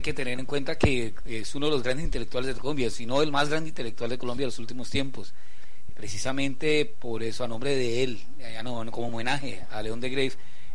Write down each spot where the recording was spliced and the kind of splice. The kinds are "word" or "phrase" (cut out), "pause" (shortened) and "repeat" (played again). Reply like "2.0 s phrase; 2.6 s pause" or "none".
none